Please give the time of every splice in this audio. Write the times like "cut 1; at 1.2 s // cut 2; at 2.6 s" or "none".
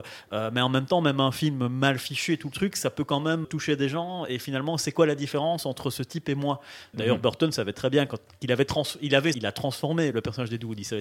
cut 1; at 3.4 s // cut 2; at 6.9 s // cut 3; at 7.7 s // cut 4; at 9.3 s